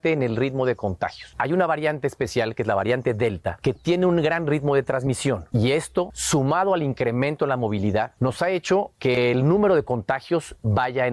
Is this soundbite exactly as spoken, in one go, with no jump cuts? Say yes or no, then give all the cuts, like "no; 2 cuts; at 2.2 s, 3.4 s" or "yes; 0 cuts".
yes; 0 cuts